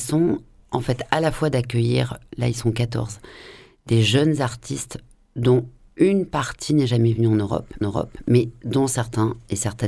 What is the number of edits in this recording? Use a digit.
1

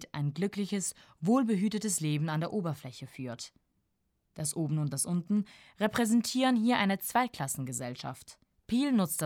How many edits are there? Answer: 0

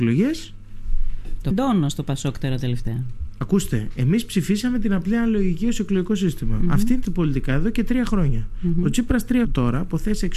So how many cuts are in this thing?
3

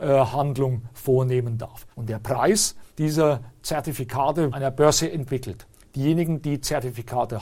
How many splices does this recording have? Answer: 4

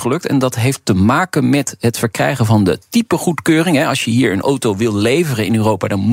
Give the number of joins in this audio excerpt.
0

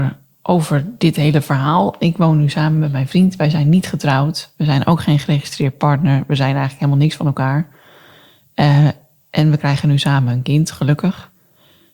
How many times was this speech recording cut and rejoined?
0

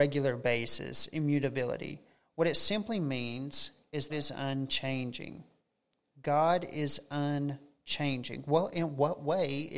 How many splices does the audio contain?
1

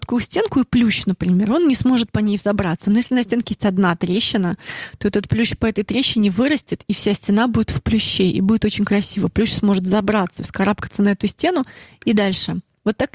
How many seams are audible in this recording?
0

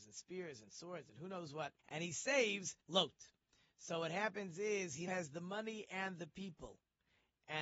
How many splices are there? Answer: 3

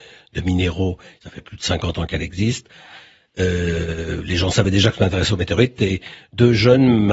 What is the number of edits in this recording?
0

